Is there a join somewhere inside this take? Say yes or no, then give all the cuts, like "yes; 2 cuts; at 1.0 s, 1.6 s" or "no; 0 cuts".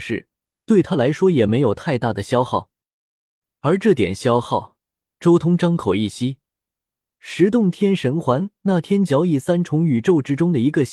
no; 0 cuts